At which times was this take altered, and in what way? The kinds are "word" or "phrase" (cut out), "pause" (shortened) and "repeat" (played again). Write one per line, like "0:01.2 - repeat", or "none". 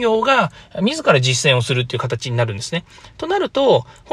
none